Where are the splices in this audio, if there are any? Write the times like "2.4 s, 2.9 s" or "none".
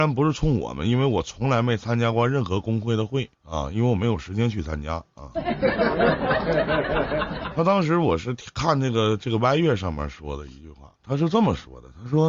3.3 s, 11.0 s